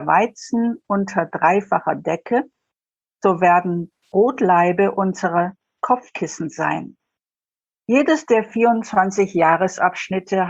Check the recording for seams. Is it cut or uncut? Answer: uncut